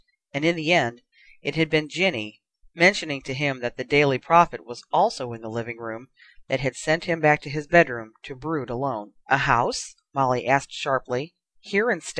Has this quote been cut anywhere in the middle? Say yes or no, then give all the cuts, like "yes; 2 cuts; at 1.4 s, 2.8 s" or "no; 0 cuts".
yes; 1 cut; at 9.2 s